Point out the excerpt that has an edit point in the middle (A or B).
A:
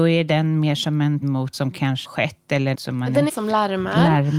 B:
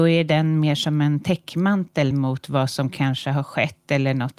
A